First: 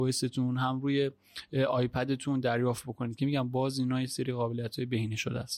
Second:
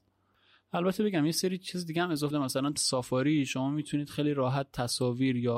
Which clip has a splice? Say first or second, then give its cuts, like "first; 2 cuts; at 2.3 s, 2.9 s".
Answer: second; 2 cuts; at 2.3 s, 2.8 s